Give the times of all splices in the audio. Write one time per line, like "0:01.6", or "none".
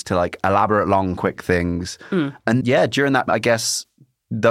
0:02.6
0:03.3